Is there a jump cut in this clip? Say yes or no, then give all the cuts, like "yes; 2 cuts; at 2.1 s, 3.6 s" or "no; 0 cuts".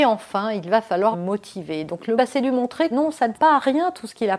yes; 4 cuts; at 1.1 s, 2.2 s, 2.9 s, 3.3 s